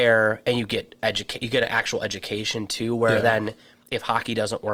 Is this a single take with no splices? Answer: yes; 0 cuts

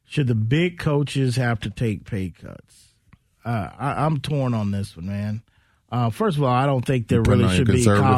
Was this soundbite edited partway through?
no; 0 cuts

